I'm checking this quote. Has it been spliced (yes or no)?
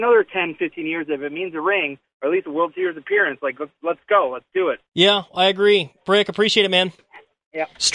yes